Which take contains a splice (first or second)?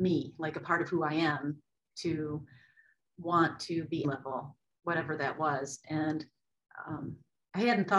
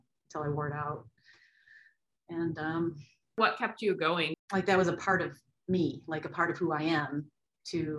first